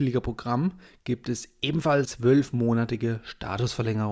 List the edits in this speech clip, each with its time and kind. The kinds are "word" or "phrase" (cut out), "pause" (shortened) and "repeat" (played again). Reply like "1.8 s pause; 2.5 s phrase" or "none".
2.0 s word